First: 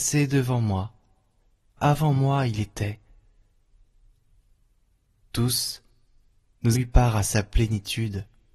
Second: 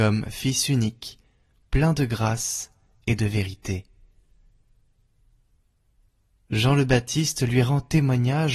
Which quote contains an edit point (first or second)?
first